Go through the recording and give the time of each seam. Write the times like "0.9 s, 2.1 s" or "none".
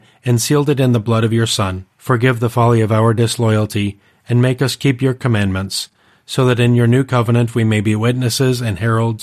1.9 s